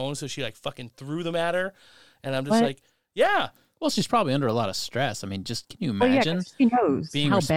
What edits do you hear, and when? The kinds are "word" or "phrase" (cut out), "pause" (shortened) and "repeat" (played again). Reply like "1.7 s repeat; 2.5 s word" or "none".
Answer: none